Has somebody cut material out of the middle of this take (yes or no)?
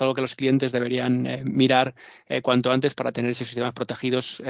no